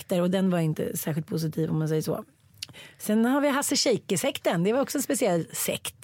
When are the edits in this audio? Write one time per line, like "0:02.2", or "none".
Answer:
none